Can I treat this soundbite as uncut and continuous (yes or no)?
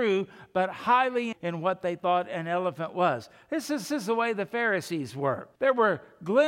no